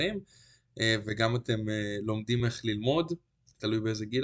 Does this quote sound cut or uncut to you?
uncut